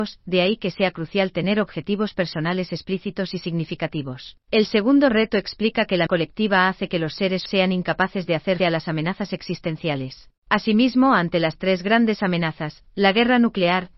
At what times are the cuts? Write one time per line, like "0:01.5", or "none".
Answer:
0:04.4
0:06.1
0:07.5
0:08.6
0:10.4
0:12.9